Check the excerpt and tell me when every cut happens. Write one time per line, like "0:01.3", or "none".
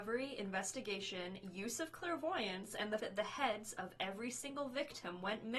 0:03.0